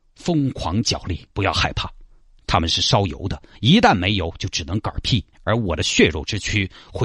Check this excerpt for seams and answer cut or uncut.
cut